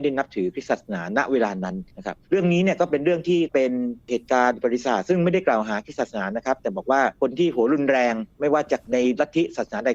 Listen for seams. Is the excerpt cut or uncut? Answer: cut